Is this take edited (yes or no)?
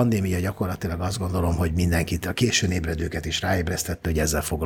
no